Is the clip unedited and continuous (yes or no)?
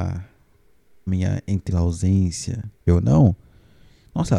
no